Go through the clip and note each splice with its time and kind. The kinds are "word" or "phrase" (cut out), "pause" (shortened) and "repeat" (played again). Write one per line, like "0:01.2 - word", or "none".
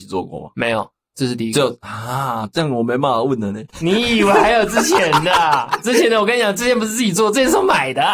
none